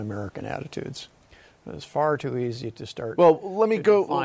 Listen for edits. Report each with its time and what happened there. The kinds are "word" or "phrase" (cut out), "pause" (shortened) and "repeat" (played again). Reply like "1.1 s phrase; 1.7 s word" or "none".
none

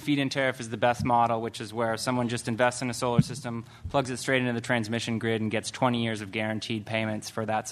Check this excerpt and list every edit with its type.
none

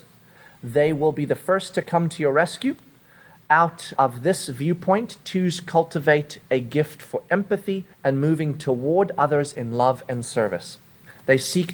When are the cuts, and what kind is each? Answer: 4.0 s word; 7.9 s pause

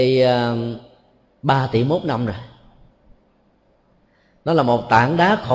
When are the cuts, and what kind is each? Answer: none

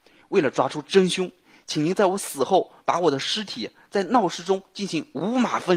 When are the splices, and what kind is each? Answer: none

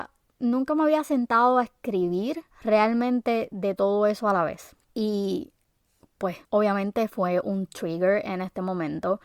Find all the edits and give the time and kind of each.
2.5 s pause; 4.8 s pause; 6.4 s pause

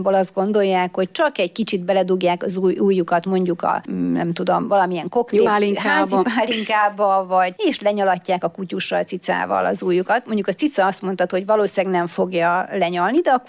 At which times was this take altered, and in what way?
5.5 s phrase; 7.6 s word

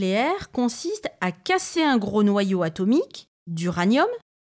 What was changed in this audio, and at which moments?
none

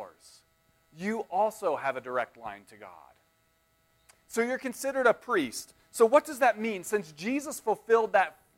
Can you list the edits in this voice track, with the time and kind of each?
none

